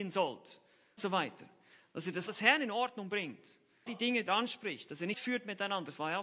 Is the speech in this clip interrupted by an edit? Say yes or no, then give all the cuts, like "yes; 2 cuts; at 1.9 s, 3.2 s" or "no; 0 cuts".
yes; 5 cuts; at 1.0 s, 2.3 s, 3.9 s, 4.3 s, 5.1 s